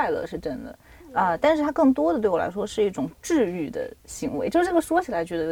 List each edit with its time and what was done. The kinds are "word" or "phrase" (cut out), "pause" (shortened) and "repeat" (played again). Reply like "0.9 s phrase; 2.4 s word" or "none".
3.2 s pause